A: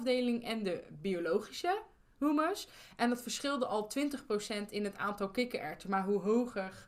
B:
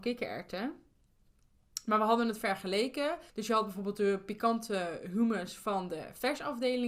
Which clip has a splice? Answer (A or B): B